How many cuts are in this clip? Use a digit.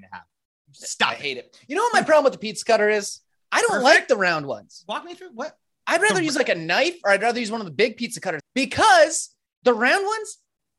1